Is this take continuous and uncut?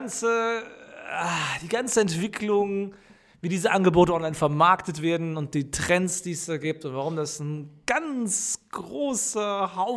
yes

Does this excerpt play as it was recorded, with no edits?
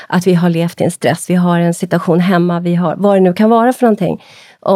no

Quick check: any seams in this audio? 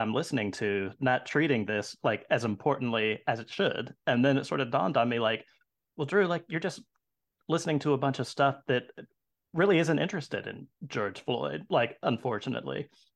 no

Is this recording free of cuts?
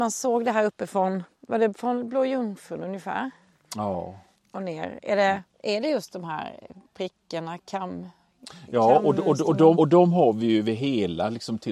no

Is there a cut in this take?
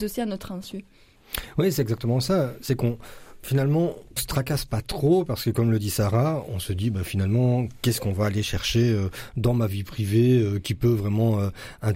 yes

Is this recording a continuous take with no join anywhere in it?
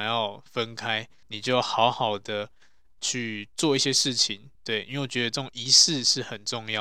no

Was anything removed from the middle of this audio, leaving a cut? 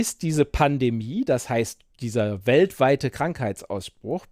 no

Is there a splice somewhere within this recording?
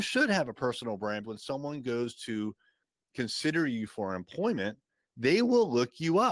yes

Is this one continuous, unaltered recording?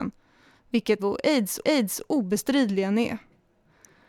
no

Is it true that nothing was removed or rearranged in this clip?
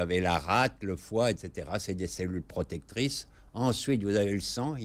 yes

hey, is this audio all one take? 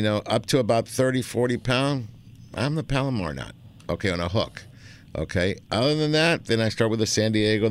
yes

